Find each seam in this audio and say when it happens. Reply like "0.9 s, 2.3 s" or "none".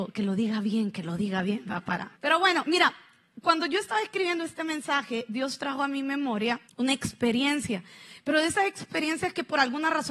2.2 s, 6.7 s

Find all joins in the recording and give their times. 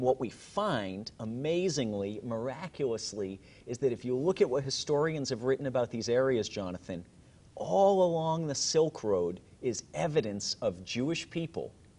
none

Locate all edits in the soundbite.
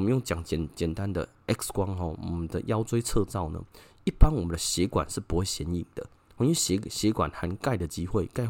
none

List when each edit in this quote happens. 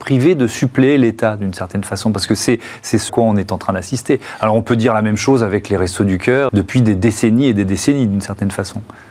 3.1 s, 6.5 s

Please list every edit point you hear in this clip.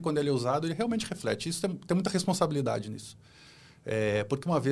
none

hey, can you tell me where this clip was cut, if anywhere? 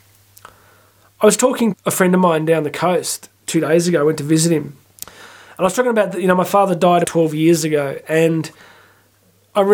1.7 s, 4.8 s, 7.0 s

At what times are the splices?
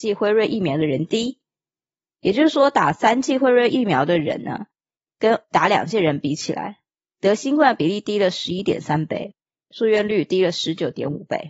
none

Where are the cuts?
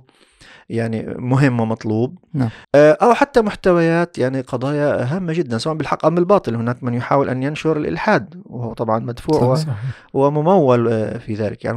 2.6 s

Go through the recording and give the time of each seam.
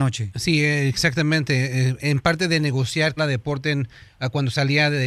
3.2 s

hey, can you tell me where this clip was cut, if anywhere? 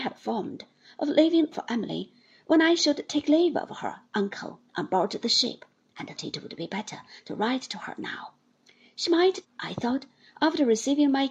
1.5 s, 4.7 s, 6.2 s, 9.4 s

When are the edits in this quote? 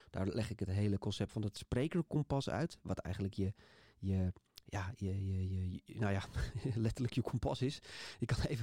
none

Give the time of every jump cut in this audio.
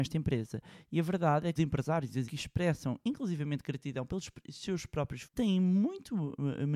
1.6 s, 2.3 s, 5.2 s

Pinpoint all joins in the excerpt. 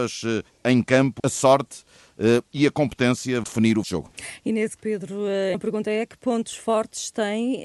1.2 s, 3.4 s, 3.8 s, 4.8 s, 5.5 s

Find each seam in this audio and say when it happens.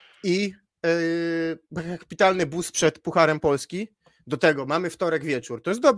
none

